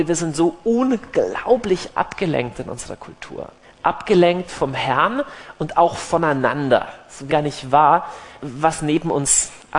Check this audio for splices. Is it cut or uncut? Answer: cut